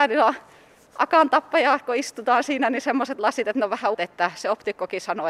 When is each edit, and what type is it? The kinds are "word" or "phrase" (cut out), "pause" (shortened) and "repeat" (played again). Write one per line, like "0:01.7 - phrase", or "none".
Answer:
0:03.9 - word